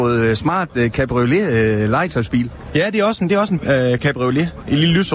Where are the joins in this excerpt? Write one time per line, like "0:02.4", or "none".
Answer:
0:03.6